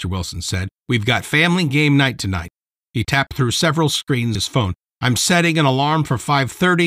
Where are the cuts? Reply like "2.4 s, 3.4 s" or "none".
4.3 s

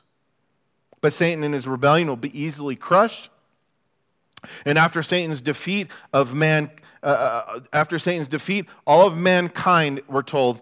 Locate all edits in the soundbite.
none

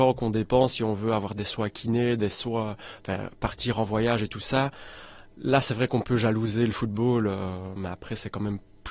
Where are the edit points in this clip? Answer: none

